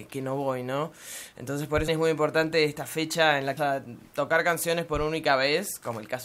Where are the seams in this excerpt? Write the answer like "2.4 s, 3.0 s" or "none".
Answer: 1.9 s, 3.6 s